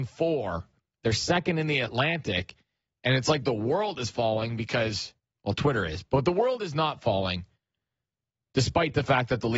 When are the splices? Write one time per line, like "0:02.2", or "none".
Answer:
none